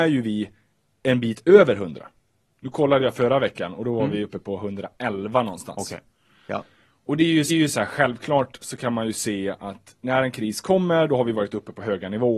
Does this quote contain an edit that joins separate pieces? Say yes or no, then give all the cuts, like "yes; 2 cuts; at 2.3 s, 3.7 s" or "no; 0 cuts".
yes; 1 cut; at 7.5 s